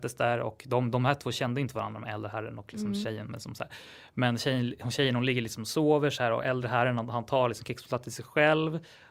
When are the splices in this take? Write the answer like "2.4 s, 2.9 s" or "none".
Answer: none